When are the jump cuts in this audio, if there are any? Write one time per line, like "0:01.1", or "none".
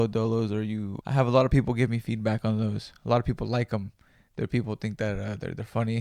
0:01.0